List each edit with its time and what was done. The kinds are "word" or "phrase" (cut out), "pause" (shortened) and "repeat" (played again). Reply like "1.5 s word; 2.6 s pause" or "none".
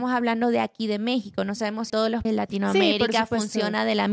1.9 s word; 2.2 s word